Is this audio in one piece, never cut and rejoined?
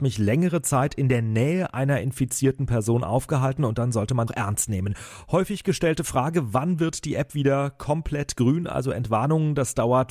no; 1 cut; at 4.3 s

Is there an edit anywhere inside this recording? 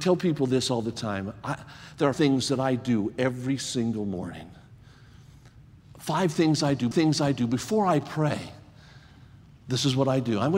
yes; 2 cuts; at 2.1 s, 6.9 s

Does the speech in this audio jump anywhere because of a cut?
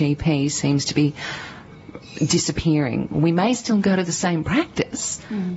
no; 0 cuts

